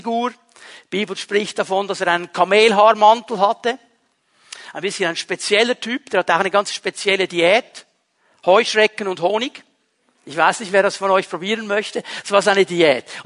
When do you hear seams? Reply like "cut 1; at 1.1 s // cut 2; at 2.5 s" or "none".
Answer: none